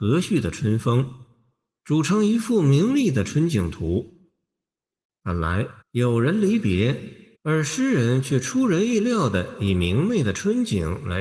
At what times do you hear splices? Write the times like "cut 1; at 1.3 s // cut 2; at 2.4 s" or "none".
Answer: cut 1; at 5.8 s // cut 2; at 7.3 s